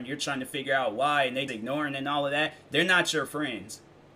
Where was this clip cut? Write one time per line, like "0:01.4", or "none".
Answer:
0:01.5

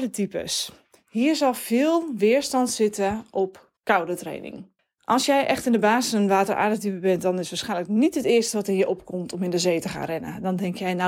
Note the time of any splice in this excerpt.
0:03.8
0:04.8

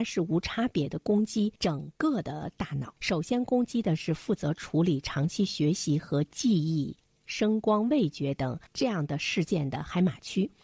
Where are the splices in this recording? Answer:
0:01.6
0:03.0

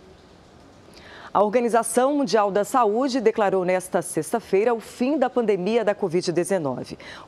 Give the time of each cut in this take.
none

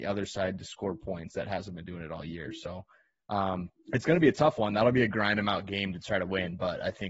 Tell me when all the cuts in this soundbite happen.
0:03.8

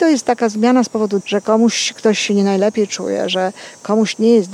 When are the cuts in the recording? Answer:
0:01.2

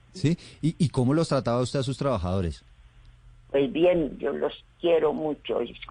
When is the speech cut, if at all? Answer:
none

